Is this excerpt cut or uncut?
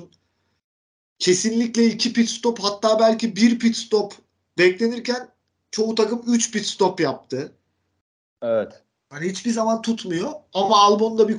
uncut